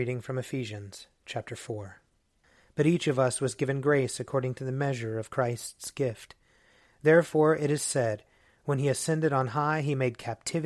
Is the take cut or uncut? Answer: uncut